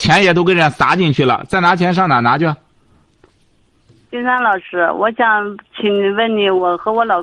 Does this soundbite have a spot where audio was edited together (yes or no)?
no